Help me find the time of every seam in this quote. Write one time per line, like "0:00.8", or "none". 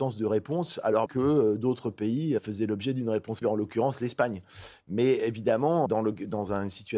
0:01.1
0:02.4
0:03.4
0:05.9